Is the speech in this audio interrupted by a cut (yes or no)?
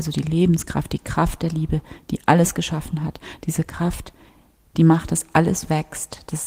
no